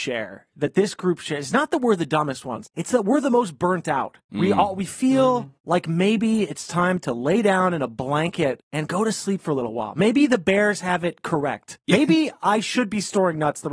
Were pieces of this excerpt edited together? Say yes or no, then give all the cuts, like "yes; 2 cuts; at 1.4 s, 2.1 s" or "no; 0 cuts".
no; 0 cuts